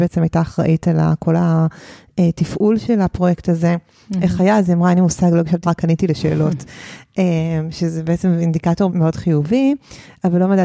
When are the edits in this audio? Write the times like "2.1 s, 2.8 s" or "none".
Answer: 5.6 s, 8.9 s